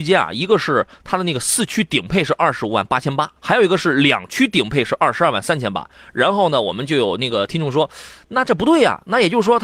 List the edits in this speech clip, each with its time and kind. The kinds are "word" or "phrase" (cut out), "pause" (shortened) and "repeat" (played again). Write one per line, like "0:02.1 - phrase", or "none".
0:03.4 - pause